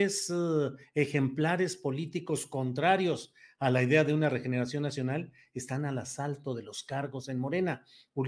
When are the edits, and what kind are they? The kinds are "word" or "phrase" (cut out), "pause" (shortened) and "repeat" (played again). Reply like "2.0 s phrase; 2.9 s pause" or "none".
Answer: none